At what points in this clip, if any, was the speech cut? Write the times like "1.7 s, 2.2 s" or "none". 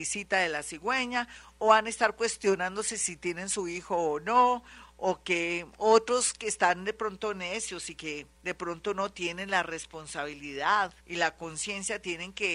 8.3 s, 11.0 s